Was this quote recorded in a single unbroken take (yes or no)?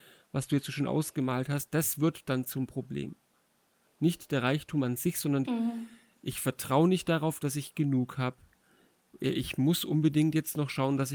no